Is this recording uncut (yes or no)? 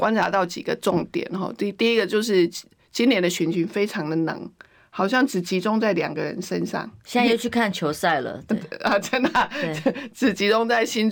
yes